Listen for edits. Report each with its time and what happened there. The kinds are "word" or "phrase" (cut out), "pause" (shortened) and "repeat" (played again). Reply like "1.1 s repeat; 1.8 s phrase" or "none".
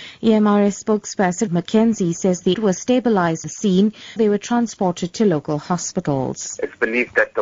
1.5 s word; 2.5 s word; 3.4 s word; 4.2 s word